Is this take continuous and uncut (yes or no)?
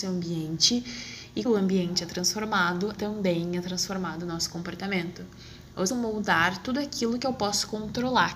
no